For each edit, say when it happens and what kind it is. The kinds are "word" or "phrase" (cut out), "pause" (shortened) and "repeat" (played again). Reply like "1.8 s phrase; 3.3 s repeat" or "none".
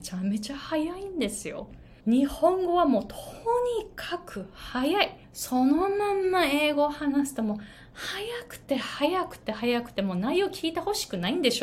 2.0 s pause; 5.2 s pause